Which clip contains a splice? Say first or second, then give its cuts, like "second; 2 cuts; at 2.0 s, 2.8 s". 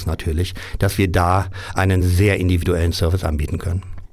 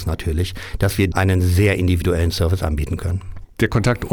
second; 1 cut; at 1.1 s